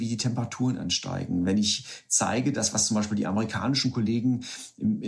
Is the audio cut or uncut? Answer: uncut